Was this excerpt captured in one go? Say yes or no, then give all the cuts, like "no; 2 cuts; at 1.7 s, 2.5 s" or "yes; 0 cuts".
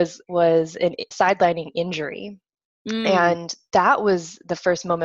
no; 1 cut; at 1.1 s